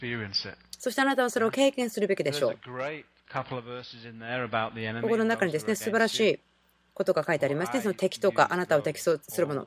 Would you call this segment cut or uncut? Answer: uncut